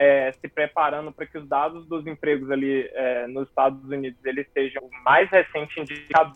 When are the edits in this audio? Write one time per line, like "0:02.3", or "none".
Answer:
0:04.8